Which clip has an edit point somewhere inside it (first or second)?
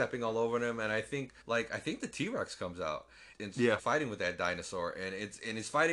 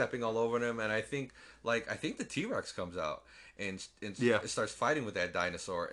first